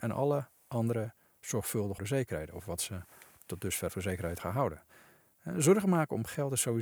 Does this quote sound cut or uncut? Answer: cut